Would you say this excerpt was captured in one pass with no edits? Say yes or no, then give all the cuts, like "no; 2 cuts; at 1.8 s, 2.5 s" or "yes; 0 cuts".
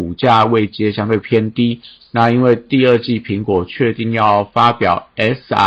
yes; 0 cuts